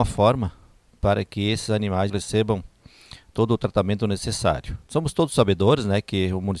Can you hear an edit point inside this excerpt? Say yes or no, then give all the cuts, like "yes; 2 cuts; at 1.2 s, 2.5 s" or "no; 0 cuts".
yes; 1 cut; at 2.1 s